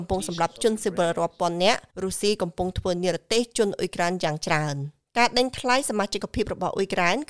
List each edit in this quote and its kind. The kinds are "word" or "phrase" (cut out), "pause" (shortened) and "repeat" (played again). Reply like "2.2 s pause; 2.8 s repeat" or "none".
1.9 s pause